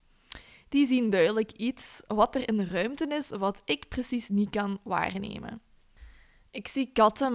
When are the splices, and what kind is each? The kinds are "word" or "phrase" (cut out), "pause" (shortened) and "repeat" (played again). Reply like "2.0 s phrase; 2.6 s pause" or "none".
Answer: none